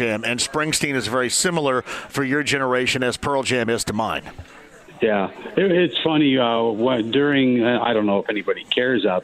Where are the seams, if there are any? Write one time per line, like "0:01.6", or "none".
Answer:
none